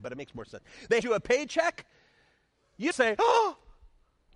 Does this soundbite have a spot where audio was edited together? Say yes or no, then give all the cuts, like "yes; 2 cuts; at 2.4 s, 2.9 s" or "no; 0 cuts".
yes; 2 cuts; at 1.0 s, 2.9 s